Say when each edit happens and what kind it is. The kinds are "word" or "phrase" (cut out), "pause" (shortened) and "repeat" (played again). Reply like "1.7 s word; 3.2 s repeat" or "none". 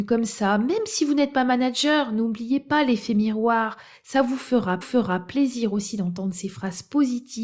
4.8 s repeat